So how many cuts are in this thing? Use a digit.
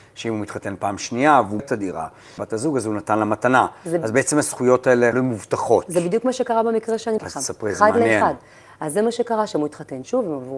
4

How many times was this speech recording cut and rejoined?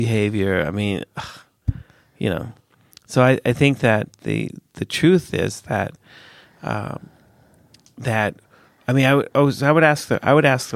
0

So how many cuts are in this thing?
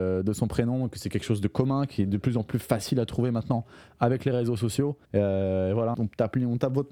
2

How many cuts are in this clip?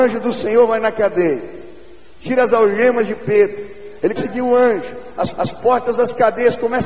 2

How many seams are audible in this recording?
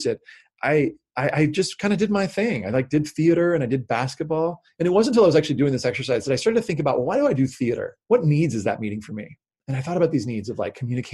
1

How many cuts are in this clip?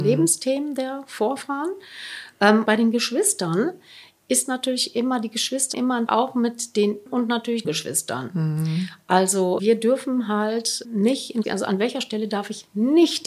9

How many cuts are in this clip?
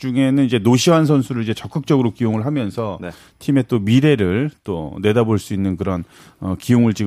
0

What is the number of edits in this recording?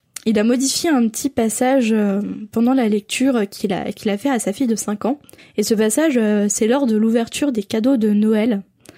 1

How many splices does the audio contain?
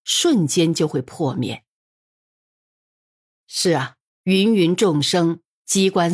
1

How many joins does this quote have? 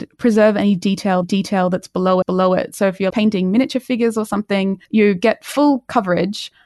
4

